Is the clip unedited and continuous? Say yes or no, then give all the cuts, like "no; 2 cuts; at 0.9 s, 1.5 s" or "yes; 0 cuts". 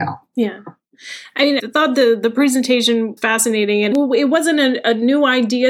no; 3 cuts; at 1.6 s, 3.2 s, 3.9 s